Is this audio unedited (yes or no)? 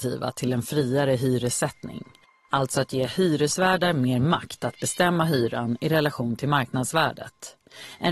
yes